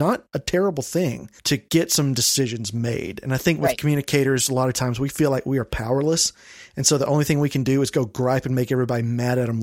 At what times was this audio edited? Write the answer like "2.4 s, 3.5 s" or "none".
1.4 s